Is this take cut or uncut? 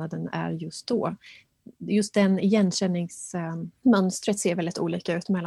uncut